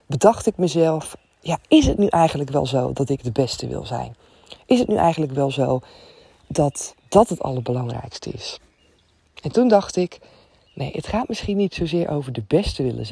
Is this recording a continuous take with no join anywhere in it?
yes; 0 cuts

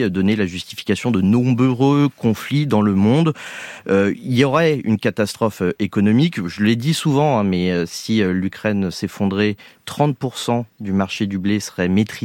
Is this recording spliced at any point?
no; 0 cuts

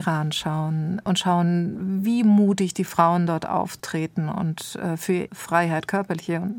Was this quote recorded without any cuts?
no; 1 cut; at 5.3 s

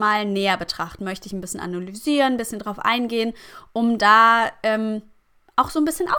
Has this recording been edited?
no; 0 cuts

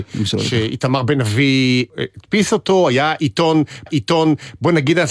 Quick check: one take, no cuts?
no; 1 cut; at 3.9 s

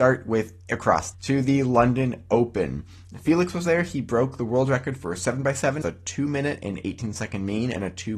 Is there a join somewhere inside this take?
yes; 2 cuts; at 1.1 s, 5.8 s

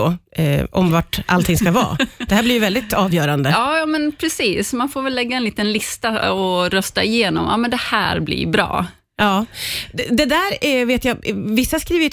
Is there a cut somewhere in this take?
no; 0 cuts

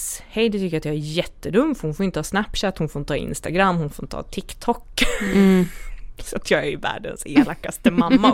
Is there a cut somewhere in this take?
no; 0 cuts

